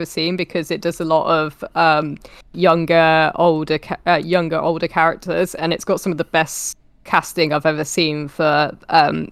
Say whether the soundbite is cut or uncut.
cut